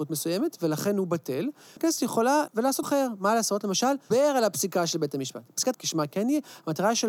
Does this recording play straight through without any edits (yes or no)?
no